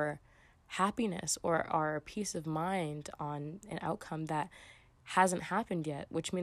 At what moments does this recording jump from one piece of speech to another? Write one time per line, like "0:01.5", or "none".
0:03.6